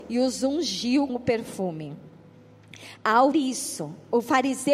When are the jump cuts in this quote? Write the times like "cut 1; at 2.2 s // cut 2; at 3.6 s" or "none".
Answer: cut 1; at 1.1 s // cut 2; at 3.3 s